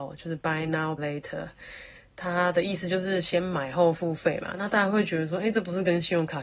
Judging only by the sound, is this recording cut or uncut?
cut